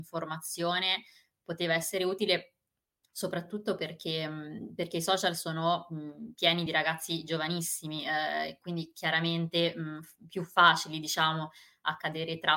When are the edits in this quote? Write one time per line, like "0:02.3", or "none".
none